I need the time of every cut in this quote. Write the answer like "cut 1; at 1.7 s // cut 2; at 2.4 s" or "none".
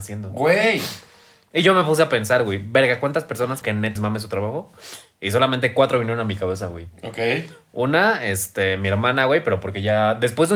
cut 1; at 3.6 s // cut 2; at 4.0 s